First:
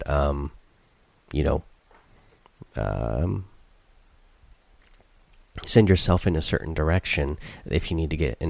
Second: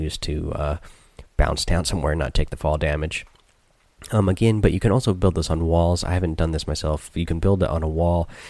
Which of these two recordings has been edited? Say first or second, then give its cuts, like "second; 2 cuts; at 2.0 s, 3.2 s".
second; 1 cut; at 1.3 s